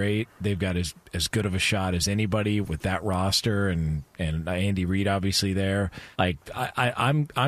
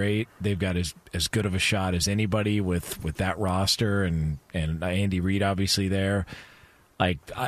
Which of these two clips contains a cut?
first; 2 cuts; at 2.6 s, 6.1 s

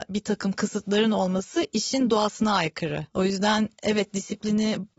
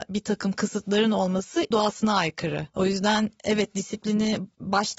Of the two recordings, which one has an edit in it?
second; 1 cut; at 1.7 s

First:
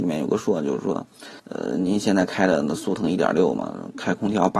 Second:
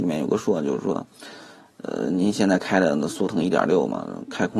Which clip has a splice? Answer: first; 1 cut; at 1.4 s

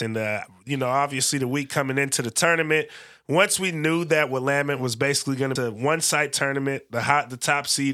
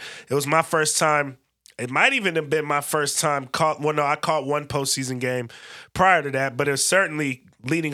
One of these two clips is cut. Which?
first; 1 cut; at 5.6 s

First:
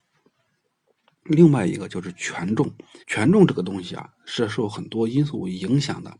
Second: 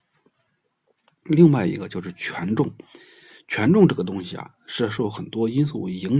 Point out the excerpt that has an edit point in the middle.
first; 1 cut; at 3.0 s

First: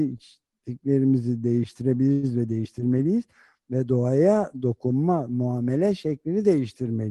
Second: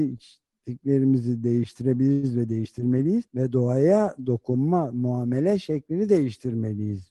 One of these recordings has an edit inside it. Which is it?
second; 1 cut; at 3.3 s

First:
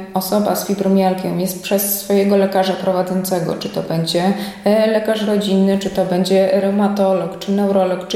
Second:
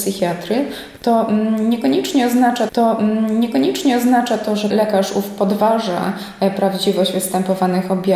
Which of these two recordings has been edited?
second; 2 cuts; at 2.7 s, 4.7 s

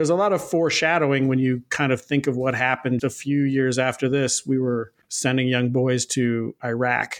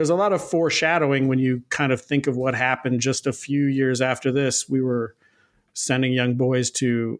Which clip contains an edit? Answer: first; 2 cuts; at 3.0 s, 5.0 s

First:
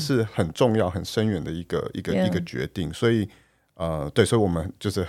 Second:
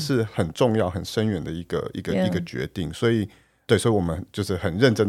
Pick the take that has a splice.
second; 1 cut; at 3.7 s

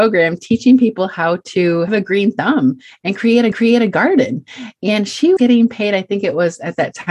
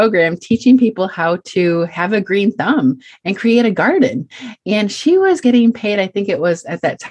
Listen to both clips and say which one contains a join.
first; 3 cuts; at 1.9 s, 3.5 s, 5.4 s

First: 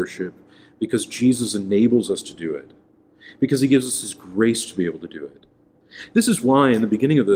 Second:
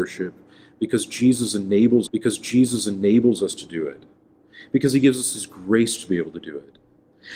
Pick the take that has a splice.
second; 1 cut; at 2.1 s

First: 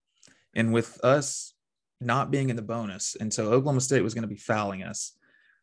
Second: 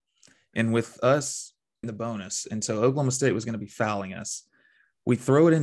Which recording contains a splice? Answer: second; 1 cut; at 1.8 s

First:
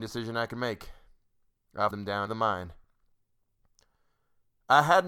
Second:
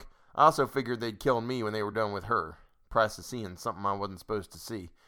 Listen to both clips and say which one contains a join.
first; 2 cuts; at 1.9 s, 2.3 s

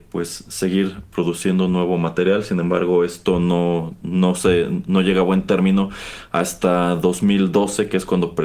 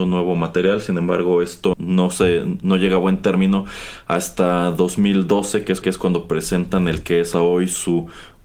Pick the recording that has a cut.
second; 3 cuts; at 1.7 s, 5.8 s, 7.3 s

